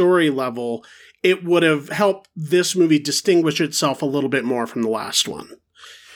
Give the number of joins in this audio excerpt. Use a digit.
0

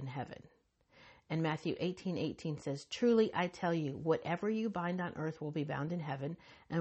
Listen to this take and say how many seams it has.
0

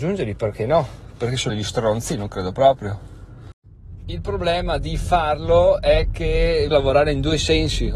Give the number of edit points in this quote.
2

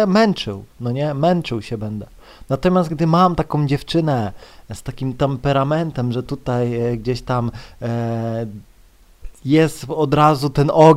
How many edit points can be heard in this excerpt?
0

